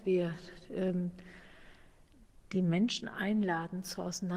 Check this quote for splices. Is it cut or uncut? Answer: uncut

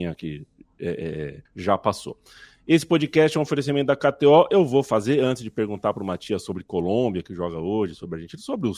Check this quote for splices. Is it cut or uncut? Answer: cut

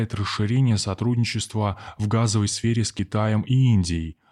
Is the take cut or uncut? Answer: uncut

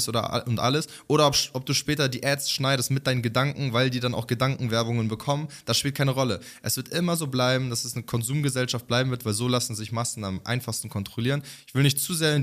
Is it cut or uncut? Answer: uncut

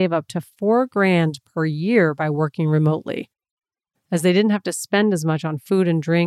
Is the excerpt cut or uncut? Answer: uncut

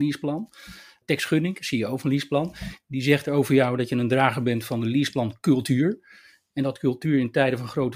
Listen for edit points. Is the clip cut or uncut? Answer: uncut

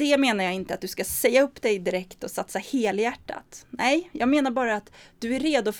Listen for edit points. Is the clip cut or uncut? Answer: uncut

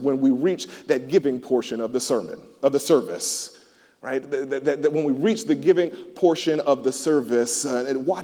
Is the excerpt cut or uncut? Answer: uncut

